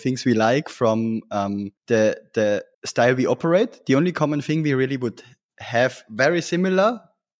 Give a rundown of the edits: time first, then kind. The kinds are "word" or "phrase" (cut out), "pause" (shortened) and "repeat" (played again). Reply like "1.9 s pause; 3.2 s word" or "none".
1.8 s pause; 2.7 s pause